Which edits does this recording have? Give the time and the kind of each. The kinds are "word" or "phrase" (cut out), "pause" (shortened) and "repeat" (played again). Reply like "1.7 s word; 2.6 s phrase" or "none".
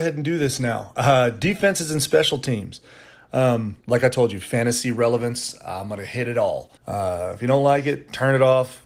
3.8 s pause; 6.8 s pause